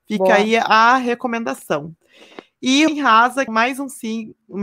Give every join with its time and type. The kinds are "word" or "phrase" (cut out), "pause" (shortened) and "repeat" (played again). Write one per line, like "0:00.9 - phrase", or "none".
0:02.9 - word
0:03.5 - word